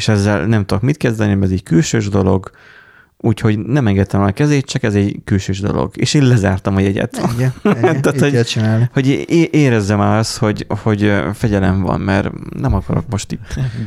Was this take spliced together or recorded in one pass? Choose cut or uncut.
uncut